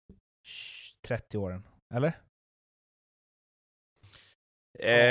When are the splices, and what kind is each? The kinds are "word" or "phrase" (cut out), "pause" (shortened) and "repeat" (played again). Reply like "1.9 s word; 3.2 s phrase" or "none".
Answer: none

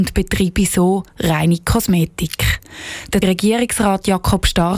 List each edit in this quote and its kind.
3.2 s word

